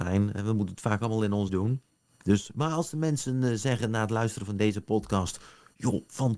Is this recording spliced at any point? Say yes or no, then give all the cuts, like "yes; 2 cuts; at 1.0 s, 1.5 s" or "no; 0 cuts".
yes; 1 cut; at 1.5 s